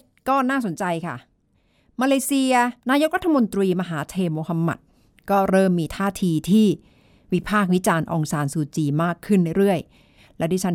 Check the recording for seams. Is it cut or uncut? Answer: cut